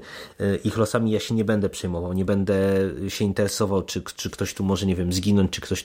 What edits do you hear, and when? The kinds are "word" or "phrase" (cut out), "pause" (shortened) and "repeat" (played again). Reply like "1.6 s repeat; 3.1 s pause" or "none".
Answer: none